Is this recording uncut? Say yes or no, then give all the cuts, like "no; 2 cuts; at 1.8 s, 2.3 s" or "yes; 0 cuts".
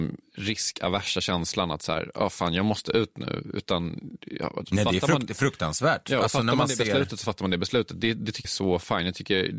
no; 1 cut; at 8.4 s